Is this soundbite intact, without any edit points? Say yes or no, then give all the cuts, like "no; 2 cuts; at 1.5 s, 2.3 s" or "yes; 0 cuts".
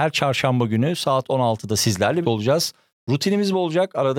no; 1 cut; at 2.2 s